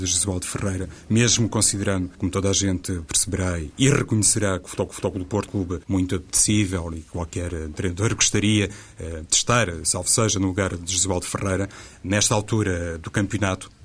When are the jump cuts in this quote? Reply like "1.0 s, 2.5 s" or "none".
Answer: 2.1 s, 4.9 s, 5.5 s, 5.8 s